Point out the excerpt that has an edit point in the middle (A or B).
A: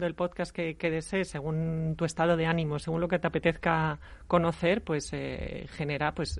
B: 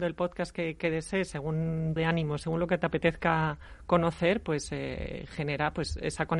B